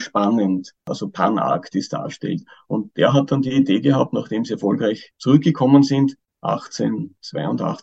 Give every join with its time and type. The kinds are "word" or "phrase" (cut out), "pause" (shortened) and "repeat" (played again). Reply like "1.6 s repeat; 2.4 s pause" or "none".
none